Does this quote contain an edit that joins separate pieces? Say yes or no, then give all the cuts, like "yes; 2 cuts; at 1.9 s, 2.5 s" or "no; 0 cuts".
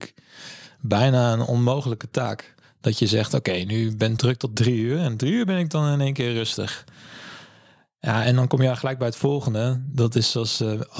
no; 0 cuts